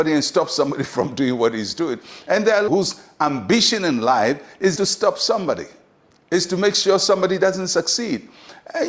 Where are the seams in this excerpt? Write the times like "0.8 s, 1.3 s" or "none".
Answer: 2.7 s, 4.8 s